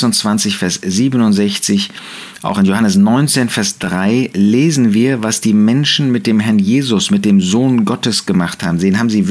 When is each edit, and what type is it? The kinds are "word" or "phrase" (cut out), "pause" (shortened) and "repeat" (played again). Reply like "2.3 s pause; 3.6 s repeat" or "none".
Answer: none

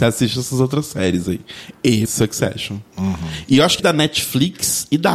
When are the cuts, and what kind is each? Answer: 2.1 s word; 3.8 s word

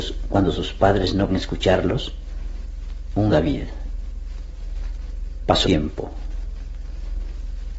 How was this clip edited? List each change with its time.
1.3 s word; 3.3 s word; 5.6 s word

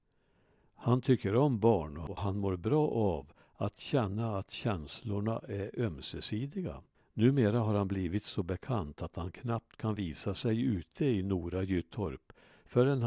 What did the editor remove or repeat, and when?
none

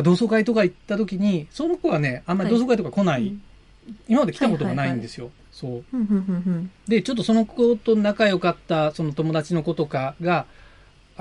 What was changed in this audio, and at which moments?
5.5 s pause

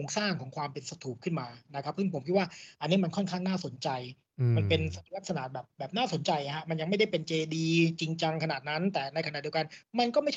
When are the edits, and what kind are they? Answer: 5.1 s pause

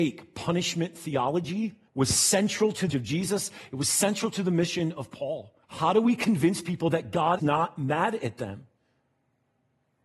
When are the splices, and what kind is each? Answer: 1.9 s pause; 2.9 s word; 5.6 s pause; 7.4 s word

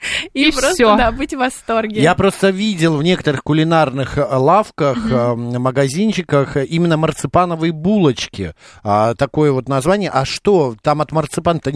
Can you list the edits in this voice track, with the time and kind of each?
none

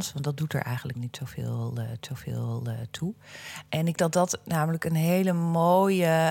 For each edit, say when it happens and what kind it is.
0.9 s word; 2.0 s repeat; 4.0 s word

